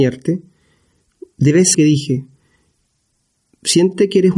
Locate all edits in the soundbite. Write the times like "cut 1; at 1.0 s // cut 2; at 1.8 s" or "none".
cut 1; at 1.7 s